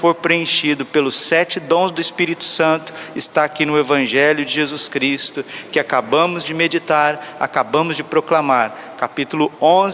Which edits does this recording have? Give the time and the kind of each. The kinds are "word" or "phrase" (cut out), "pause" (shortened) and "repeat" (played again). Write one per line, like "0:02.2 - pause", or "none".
none

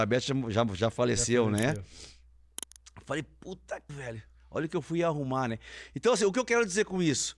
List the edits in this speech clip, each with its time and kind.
0:03.9 - word

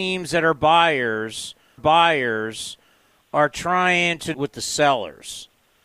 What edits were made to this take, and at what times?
0:01.8 - repeat
0:04.3 - word

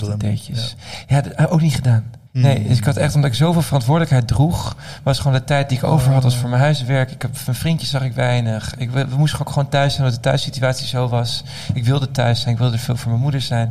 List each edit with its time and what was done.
0:02.3 - pause

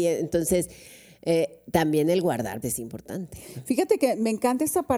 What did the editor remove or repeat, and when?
0:02.6 - word

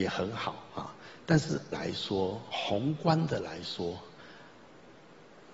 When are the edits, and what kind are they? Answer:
0:01.7 - word

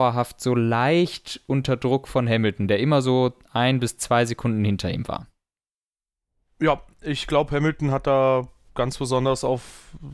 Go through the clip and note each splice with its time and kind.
none

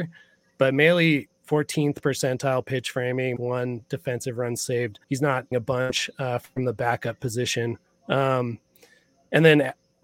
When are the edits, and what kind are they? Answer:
0:03.4 - word
0:05.0 - pause
0:05.5 - phrase
0:07.9 - pause

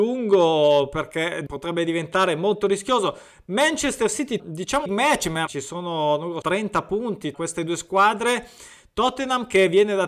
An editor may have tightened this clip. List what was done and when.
0:01.5 - word
0:04.4 - word
0:04.9 - word
0:05.5 - word
0:06.4 - word
0:07.3 - word

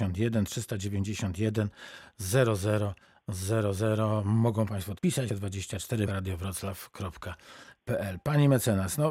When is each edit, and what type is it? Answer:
0:05.0 - word
0:05.3 - word
0:06.1 - word

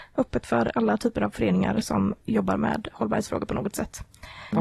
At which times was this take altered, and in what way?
none

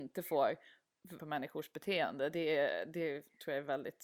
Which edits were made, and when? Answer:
0:01.2 - phrase

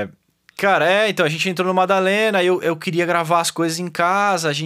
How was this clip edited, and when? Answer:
none

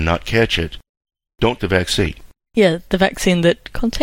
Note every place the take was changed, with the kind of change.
0:01.6 - word

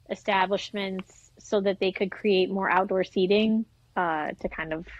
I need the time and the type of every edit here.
none

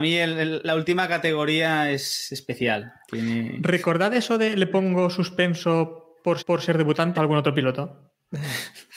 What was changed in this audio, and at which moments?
0:06.4 - repeat
0:07.1 - phrase

